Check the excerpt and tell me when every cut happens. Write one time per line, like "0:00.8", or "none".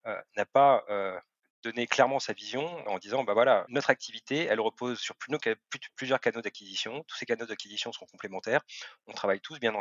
0:01.4
0:02.9
0:03.7